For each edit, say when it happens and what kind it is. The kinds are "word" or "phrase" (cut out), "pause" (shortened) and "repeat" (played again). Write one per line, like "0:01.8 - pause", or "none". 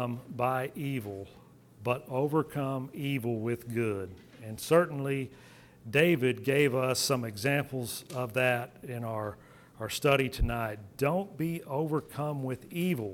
none